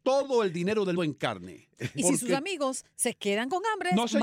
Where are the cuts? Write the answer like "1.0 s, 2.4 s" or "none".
0.9 s